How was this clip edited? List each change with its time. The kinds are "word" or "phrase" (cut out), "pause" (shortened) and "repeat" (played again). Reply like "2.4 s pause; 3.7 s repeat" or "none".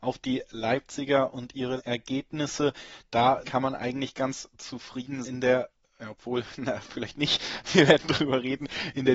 1.8 s word; 3.4 s phrase; 5.2 s word